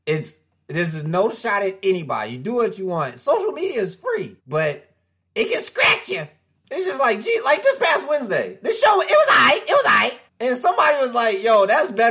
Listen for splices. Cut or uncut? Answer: cut